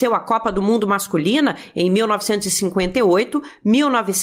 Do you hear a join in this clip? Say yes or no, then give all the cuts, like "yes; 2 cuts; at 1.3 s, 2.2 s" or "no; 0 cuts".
no; 0 cuts